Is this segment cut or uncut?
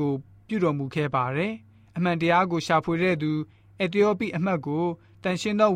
uncut